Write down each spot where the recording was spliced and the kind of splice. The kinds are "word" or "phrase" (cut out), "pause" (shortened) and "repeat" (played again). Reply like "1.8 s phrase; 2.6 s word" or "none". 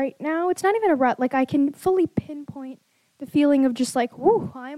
none